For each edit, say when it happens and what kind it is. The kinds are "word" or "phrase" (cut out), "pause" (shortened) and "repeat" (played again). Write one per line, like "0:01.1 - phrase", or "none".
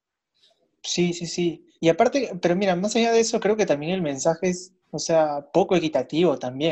0:01.7 - pause
0:04.8 - pause